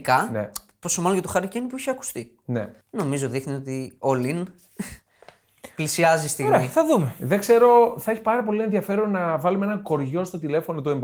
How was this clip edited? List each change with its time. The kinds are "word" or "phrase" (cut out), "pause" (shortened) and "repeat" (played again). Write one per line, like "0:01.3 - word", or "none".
0:02.8 - pause
0:05.0 - pause